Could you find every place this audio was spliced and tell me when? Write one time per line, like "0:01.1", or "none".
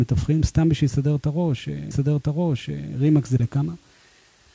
0:01.9
0:03.4